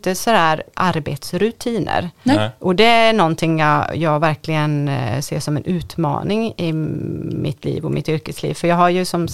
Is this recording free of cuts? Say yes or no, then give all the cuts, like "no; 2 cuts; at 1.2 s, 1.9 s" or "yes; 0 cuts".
yes; 0 cuts